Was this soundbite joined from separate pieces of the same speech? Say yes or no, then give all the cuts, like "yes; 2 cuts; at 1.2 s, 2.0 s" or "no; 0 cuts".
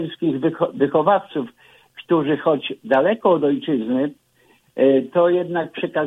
no; 0 cuts